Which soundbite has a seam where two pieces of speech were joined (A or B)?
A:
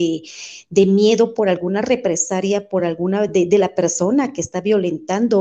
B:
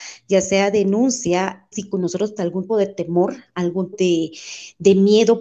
B